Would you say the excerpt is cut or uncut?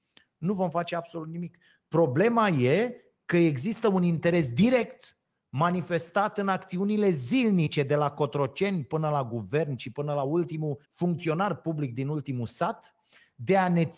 cut